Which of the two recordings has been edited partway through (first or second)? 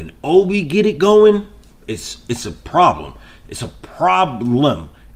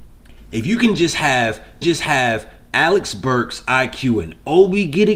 second